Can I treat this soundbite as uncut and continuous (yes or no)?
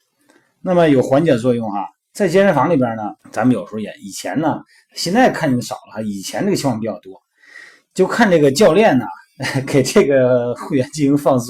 no